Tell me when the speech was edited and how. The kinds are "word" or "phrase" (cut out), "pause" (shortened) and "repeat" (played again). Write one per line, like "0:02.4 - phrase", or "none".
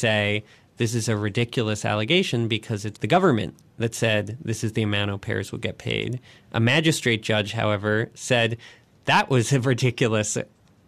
0:02.9 - word

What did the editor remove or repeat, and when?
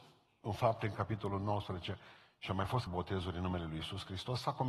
0:02.9 - word

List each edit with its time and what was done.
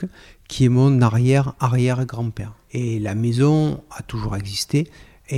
0:02.6 - pause

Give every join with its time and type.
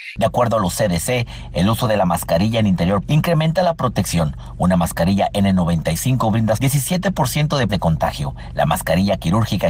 0:03.0 - word
0:06.6 - word
0:07.7 - word

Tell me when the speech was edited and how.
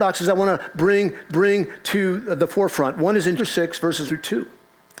0:01.3 - repeat
0:03.4 - word
0:04.1 - word

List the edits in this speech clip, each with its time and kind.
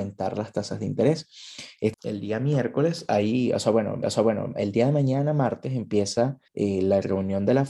0:01.9 - word
0:04.0 - repeat
0:06.5 - pause

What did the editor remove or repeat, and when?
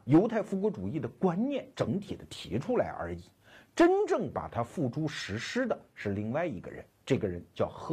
none

